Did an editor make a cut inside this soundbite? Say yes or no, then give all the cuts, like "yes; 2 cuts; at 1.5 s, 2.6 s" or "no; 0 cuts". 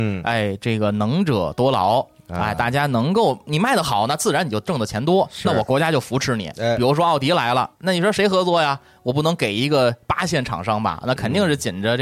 no; 0 cuts